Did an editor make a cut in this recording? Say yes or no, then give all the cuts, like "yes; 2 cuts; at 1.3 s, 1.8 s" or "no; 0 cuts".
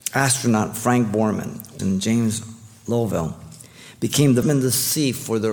yes; 2 cuts; at 1.8 s, 4.4 s